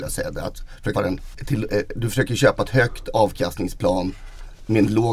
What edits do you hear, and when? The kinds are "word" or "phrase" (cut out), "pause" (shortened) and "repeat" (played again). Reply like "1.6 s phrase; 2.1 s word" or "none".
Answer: 0.9 s word